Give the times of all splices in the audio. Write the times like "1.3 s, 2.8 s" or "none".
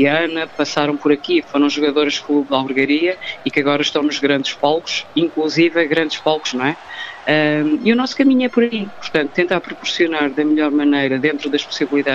1.4 s, 6.5 s